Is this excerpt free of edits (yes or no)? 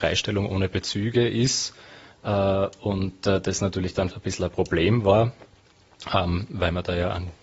no